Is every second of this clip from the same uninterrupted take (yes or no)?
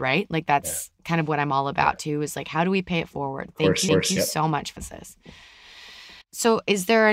no